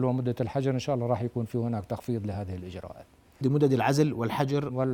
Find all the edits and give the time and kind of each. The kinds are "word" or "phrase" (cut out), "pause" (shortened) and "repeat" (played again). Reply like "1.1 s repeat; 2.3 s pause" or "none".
3.4 s word